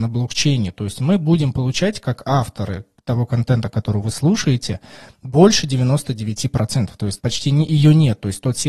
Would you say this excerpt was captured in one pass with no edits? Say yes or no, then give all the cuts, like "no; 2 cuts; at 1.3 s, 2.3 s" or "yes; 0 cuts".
no; 1 cut; at 7.2 s